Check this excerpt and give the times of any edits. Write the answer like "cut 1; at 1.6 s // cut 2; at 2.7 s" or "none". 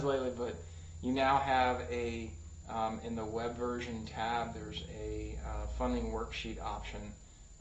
none

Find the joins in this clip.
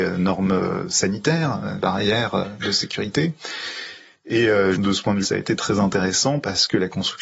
cut 1; at 1.8 s // cut 2; at 4.7 s // cut 3; at 5.2 s

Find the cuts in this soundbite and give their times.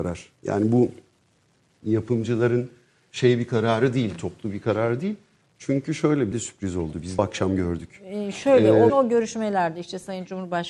cut 1; at 6.3 s // cut 2; at 7.2 s // cut 3; at 8.9 s

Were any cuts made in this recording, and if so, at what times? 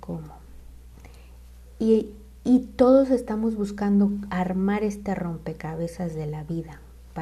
none

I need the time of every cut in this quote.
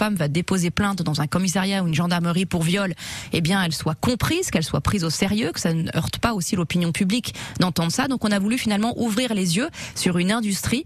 none

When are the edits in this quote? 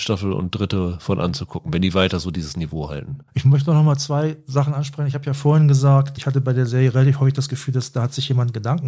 cut 1; at 3.3 s

